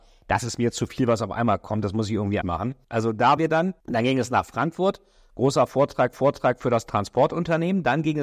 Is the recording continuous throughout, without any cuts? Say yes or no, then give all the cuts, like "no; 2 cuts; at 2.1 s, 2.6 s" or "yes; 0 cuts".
no; 5 cuts; at 2.4 s, 2.8 s, 3.4 s, 3.8 s, 6.1 s